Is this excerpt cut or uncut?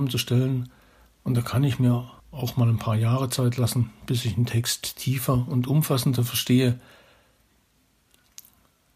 cut